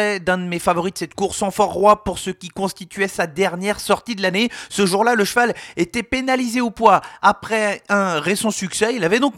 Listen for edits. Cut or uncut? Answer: uncut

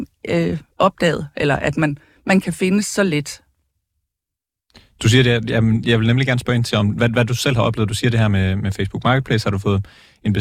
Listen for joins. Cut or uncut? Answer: uncut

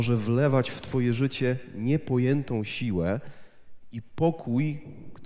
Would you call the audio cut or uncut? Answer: uncut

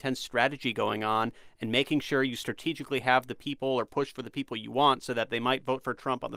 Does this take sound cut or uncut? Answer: uncut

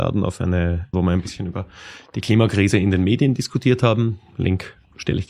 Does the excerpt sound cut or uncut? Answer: cut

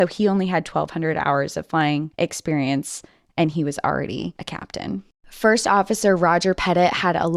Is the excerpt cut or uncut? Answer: uncut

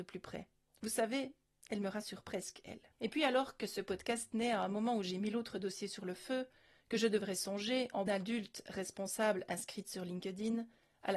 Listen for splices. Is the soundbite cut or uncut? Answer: cut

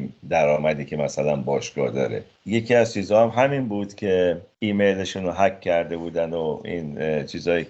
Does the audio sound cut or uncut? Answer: uncut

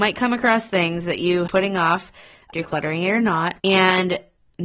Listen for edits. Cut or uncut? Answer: cut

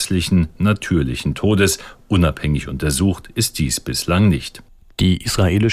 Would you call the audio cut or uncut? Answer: uncut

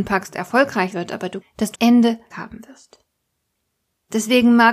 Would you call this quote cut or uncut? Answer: cut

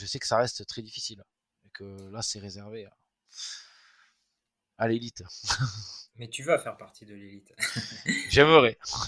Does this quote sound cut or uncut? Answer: uncut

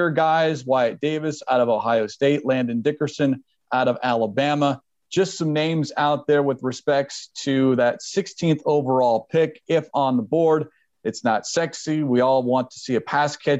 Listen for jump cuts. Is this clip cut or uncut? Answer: uncut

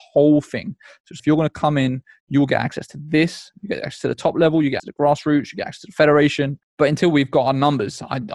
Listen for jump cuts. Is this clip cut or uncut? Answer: cut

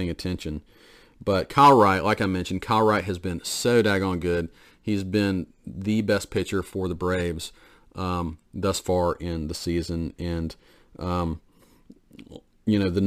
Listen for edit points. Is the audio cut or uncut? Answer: uncut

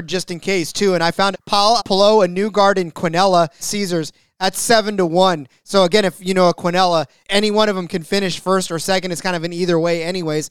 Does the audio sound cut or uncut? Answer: cut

